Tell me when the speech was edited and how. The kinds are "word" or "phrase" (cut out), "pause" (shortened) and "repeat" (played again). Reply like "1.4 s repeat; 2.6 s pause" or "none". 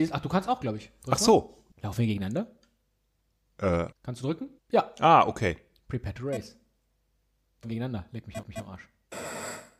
1.7 s pause; 3.9 s pause; 4.6 s pause; 7.6 s word; 8.4 s repeat